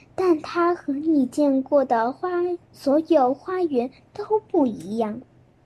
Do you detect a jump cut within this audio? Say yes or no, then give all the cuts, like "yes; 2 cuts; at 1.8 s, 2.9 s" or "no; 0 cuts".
yes; 1 cut; at 2.6 s